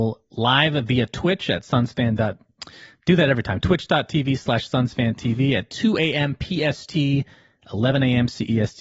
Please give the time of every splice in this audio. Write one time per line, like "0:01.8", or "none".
none